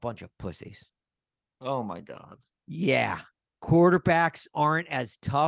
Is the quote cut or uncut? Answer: uncut